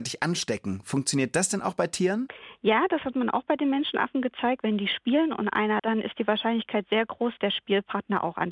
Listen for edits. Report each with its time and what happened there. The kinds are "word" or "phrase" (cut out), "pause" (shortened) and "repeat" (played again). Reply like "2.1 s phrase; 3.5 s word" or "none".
5.8 s word; 7.4 s word